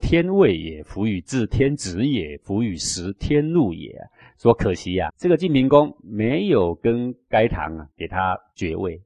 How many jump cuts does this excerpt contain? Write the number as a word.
two